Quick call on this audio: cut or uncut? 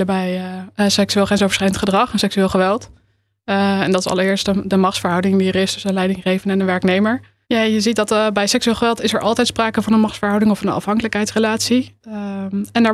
uncut